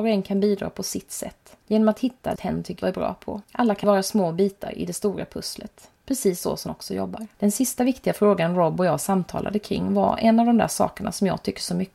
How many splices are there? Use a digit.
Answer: 8